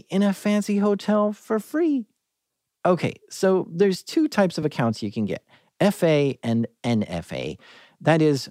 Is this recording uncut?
yes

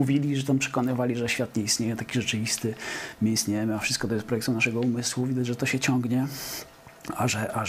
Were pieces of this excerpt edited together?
no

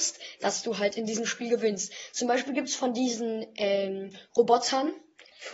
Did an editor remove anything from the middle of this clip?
no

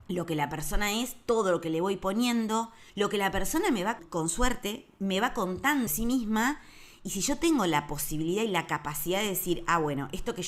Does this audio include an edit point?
yes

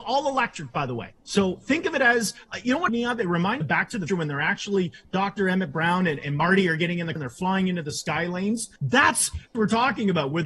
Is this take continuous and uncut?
no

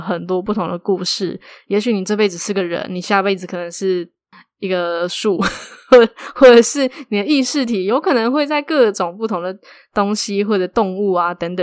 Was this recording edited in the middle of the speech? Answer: no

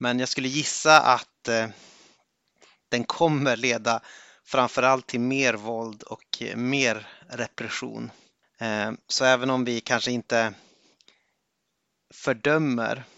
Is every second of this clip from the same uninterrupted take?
yes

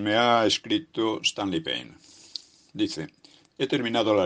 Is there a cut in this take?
no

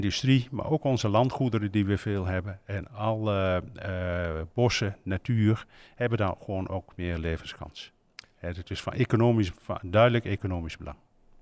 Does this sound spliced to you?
no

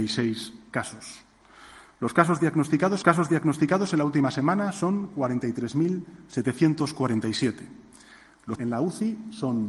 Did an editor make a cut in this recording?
yes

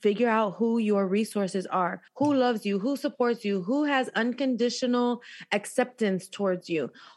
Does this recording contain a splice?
yes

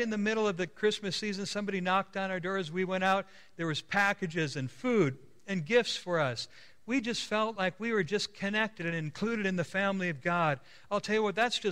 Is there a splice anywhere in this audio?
no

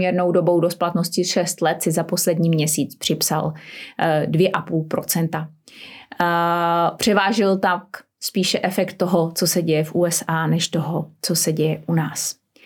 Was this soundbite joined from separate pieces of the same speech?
no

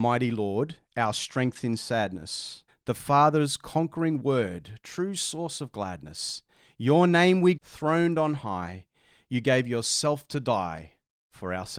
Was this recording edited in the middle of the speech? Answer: yes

